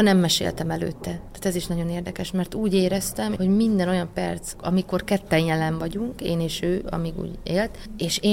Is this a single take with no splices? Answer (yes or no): yes